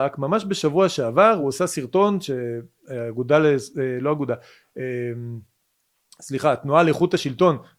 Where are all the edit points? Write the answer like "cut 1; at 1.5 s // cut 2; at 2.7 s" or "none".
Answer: none